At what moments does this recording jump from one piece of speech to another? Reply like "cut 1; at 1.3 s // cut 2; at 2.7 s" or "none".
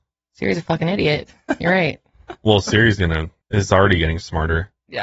cut 1; at 3.4 s